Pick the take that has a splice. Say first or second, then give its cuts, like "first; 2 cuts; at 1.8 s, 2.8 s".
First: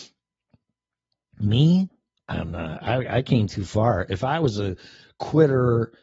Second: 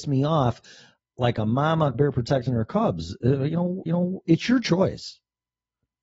second; 2 cuts; at 1.9 s, 3.9 s